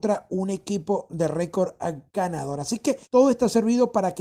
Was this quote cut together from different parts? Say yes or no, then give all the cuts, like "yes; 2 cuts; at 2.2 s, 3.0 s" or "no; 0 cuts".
yes; 1 cut; at 3.0 s